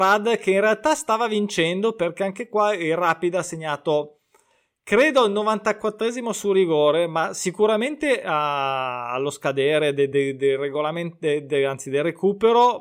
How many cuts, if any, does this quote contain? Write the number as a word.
zero